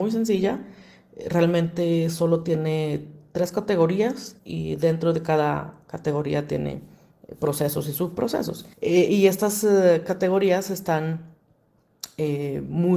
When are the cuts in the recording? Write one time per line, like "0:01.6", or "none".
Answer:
0:04.4
0:08.7